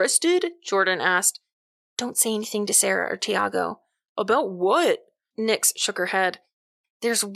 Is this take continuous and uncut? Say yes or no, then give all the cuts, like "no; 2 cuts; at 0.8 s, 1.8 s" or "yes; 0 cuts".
yes; 0 cuts